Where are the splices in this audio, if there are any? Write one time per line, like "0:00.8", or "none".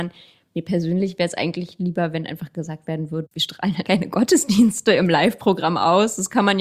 0:03.8